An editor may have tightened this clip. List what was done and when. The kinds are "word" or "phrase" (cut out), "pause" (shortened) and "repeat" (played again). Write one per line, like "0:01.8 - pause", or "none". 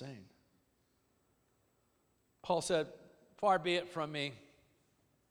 none

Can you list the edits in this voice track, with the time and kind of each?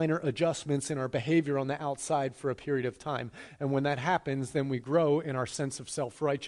none

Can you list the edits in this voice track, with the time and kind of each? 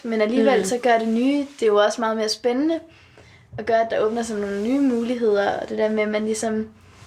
none

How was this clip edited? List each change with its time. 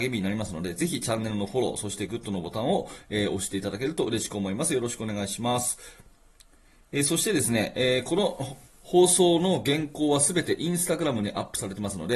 0:08.7 - pause

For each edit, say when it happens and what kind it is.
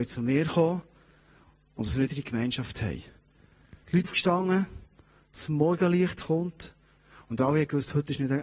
0:04.0 - word

